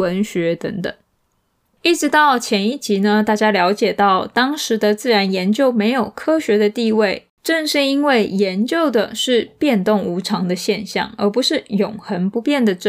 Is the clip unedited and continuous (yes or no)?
yes